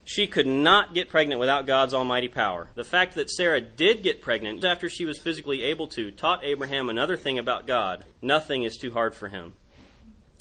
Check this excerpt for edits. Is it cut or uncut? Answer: cut